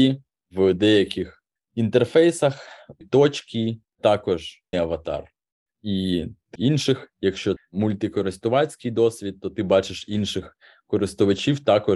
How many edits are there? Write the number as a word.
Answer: six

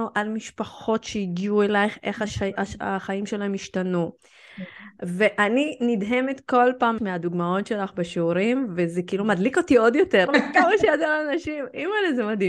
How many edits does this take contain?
two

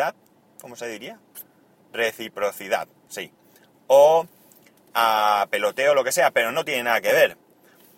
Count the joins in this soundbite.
zero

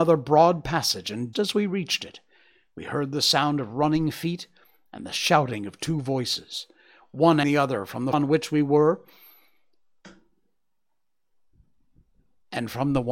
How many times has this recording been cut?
three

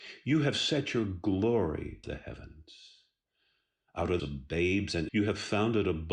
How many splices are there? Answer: three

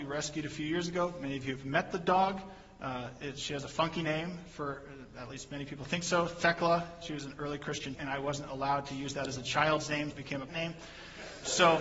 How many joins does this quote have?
three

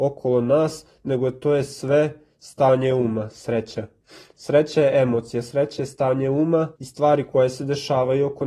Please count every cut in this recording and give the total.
one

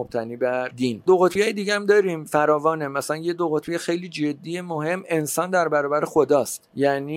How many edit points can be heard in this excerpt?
zero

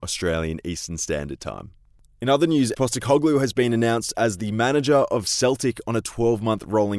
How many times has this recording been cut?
one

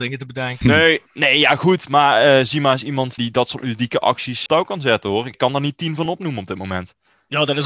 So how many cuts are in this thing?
zero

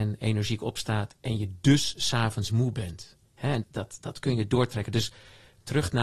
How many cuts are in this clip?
three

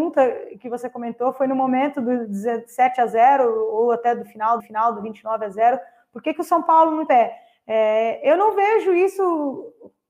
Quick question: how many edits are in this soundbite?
two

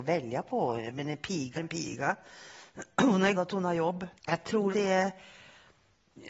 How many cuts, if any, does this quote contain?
four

